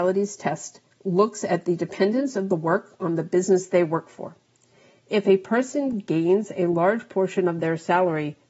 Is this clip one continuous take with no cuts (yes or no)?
yes